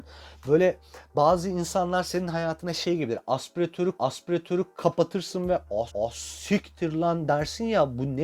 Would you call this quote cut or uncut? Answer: cut